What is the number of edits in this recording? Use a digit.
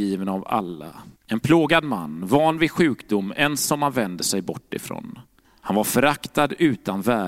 2